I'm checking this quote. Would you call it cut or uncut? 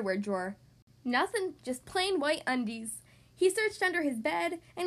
uncut